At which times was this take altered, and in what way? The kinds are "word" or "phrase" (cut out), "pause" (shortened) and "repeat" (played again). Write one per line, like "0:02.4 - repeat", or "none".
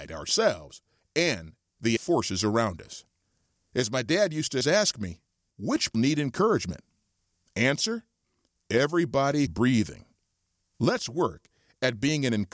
0:02.0 - word
0:04.6 - word
0:05.5 - word
0:05.9 - word
0:09.5 - word